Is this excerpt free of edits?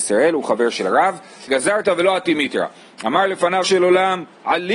no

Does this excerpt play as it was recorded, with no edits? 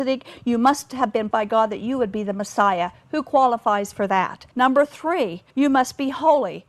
no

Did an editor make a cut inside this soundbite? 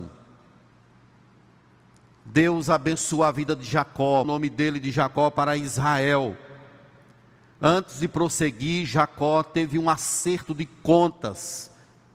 yes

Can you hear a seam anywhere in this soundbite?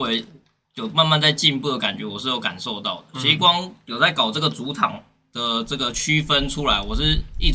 no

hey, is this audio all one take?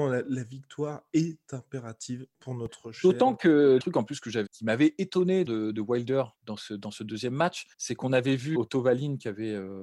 no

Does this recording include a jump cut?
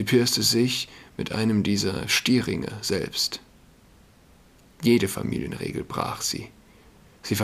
no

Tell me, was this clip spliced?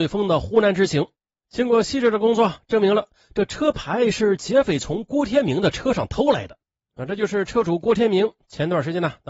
no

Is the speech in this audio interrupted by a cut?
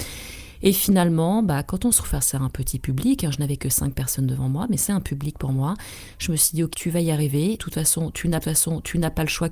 yes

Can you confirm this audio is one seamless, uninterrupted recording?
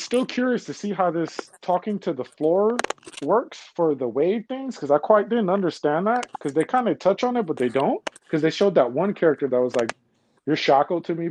yes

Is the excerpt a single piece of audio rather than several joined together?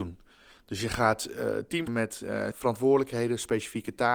no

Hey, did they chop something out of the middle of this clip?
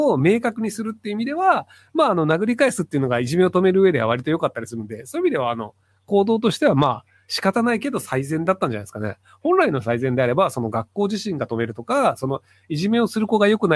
no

